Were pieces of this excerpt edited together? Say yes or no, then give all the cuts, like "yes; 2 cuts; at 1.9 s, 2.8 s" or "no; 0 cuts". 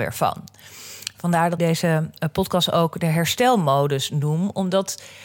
yes; 1 cut; at 1.6 s